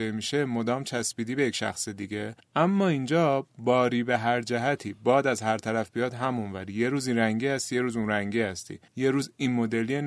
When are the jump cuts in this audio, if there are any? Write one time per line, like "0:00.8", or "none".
0:02.4
0:08.9